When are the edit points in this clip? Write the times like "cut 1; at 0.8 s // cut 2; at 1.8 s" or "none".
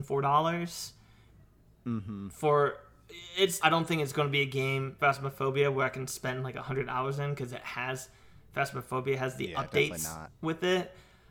cut 1; at 3.6 s // cut 2; at 5.0 s